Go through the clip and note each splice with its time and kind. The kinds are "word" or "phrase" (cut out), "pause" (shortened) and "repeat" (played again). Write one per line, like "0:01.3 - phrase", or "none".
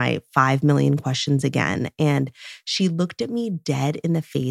none